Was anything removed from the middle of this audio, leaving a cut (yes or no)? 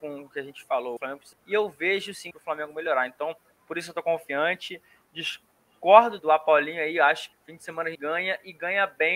yes